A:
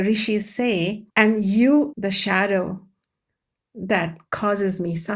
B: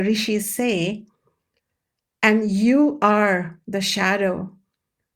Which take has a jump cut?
A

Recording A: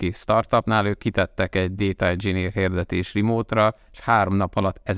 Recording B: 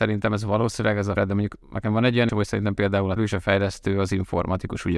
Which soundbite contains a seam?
B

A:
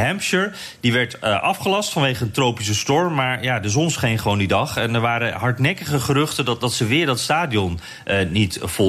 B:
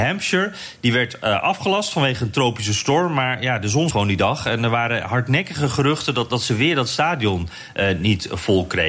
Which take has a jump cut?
B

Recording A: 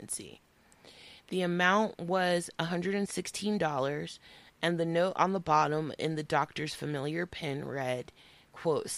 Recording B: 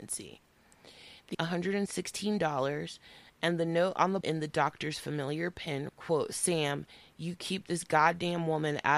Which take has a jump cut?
B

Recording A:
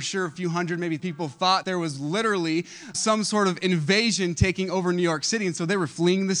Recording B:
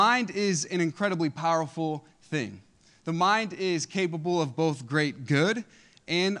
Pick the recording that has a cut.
A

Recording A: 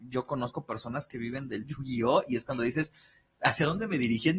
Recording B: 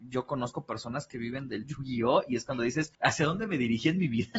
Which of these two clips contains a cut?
B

